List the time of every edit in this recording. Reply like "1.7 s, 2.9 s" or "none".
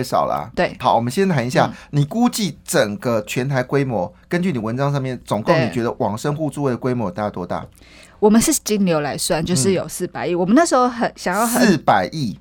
none